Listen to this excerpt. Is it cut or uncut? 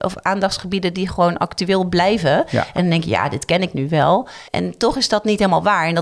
cut